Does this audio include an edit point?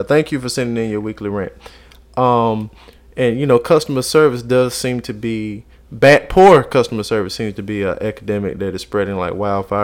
no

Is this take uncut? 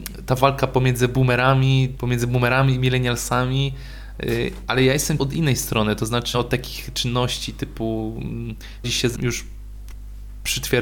no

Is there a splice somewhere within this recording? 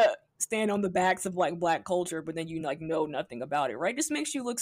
no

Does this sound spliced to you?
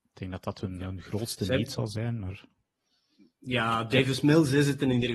no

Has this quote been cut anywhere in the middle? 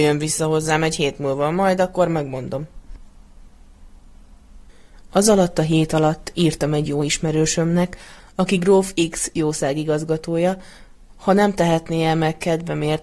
no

